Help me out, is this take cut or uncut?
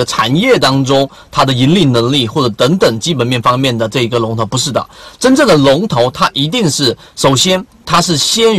uncut